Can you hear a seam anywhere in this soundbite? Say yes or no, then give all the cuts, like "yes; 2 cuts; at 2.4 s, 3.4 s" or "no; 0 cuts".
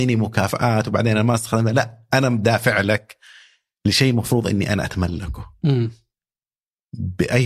no; 0 cuts